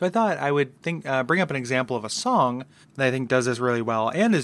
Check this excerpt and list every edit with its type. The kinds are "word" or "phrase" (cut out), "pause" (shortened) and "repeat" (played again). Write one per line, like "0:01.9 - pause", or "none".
0:02.8 - pause